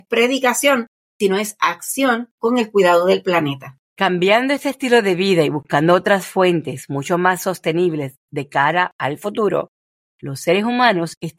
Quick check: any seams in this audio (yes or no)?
yes